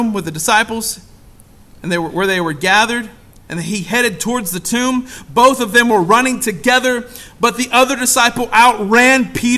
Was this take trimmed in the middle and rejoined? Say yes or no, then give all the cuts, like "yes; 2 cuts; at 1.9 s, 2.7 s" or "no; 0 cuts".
no; 0 cuts